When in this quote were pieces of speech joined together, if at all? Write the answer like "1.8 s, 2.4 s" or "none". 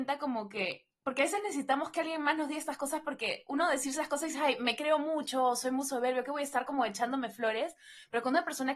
none